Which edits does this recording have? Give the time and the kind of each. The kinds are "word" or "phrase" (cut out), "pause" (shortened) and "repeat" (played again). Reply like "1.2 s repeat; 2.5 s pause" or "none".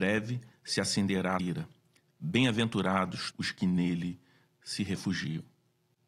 1.4 s word; 3.3 s word

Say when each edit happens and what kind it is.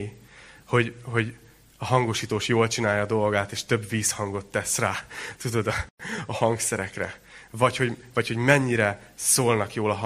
none

